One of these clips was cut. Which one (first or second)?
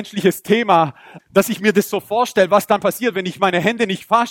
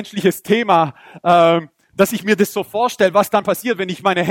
first